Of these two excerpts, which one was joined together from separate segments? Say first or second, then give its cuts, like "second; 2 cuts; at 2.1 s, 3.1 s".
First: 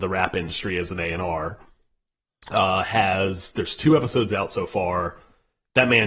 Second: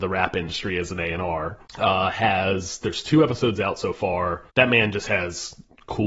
second; 2 cuts; at 1.7 s, 4.5 s